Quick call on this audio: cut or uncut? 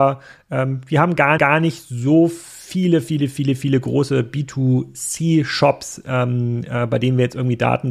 cut